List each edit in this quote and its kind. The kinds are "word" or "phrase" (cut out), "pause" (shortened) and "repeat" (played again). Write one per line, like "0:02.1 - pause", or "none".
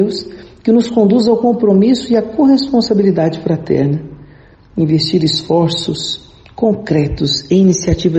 none